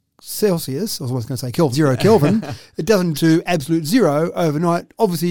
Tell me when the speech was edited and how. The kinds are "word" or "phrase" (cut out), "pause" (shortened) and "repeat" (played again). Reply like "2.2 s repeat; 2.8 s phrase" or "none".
1.7 s word; 3.1 s word